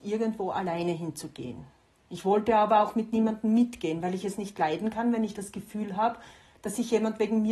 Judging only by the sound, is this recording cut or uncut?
uncut